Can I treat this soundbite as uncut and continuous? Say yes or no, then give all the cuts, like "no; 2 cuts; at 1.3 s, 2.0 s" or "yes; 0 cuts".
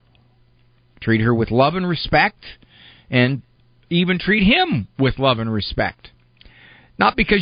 yes; 0 cuts